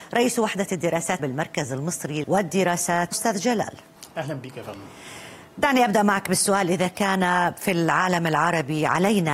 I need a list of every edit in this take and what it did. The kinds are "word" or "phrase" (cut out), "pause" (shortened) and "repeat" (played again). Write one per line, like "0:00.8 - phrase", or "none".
0:01.2 - word
0:02.2 - word
0:03.1 - phrase